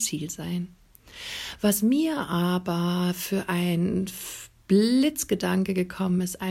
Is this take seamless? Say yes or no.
yes